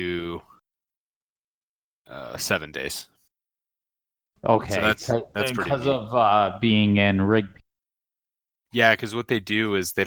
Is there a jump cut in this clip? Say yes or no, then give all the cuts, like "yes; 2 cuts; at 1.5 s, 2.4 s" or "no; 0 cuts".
no; 0 cuts